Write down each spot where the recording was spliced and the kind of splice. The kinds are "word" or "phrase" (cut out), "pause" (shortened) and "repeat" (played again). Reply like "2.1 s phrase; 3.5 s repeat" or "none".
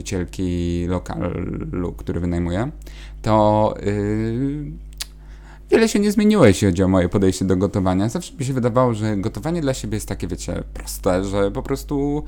none